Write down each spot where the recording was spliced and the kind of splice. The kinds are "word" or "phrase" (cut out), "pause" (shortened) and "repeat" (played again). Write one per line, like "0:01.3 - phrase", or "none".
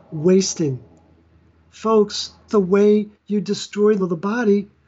0:02.5 - word
0:03.1 - pause
0:04.0 - word